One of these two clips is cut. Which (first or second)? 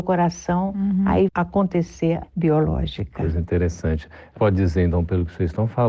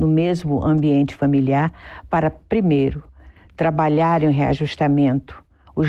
first